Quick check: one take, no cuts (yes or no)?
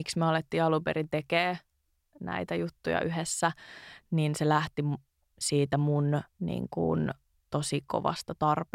no